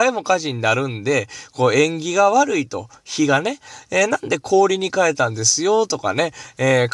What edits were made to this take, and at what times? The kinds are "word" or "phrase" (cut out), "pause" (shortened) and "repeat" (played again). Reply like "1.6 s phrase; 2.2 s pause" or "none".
none

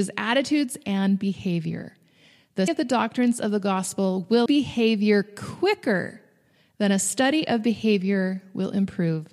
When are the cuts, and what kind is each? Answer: 2.7 s word; 4.5 s word

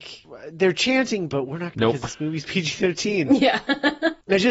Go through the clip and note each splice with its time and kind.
1.3 s word; 1.7 s phrase

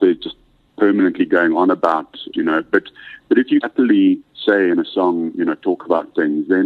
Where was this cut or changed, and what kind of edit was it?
2.3 s phrase; 3.6 s word; 4.2 s pause

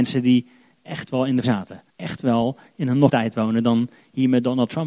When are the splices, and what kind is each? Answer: 1.4 s word; 1.9 s pause; 3.1 s word

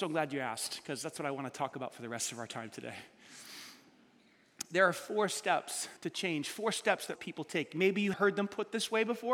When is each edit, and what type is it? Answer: 6.0 s pause; 7.2 s word; 8.1 s word

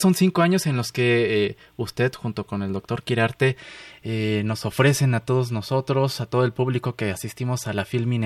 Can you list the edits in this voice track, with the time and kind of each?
none

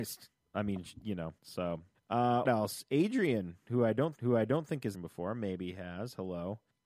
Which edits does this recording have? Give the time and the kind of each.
1.4 s pause; 2.4 s word; 4.1 s repeat; 4.9 s phrase

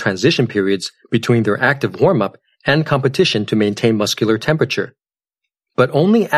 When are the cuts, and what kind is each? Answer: none

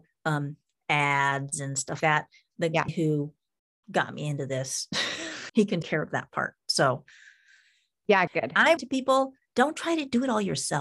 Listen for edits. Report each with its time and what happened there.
2.0 s word; 2.9 s word; 5.5 s word; 5.8 s word; 8.3 s word; 8.8 s word

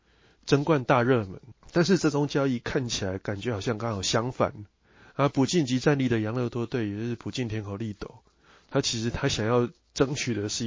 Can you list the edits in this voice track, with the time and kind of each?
none

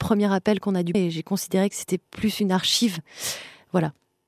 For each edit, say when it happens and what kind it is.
0.9 s word; 2.1 s pause

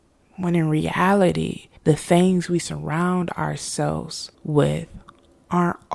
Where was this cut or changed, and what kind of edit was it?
1.8 s pause; 4.3 s pause

